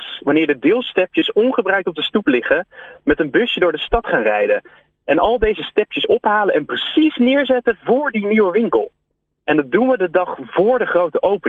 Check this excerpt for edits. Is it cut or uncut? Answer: uncut